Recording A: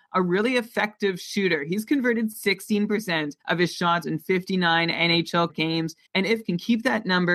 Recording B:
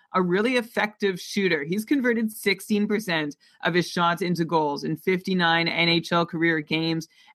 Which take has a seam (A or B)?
A